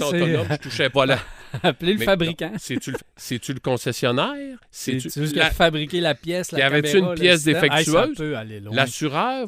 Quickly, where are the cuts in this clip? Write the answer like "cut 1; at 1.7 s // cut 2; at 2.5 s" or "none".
cut 1; at 0.9 s // cut 2; at 3.0 s // cut 3; at 4.6 s // cut 4; at 5.3 s